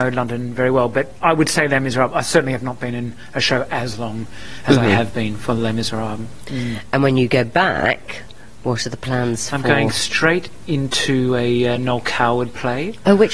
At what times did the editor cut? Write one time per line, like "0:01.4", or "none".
none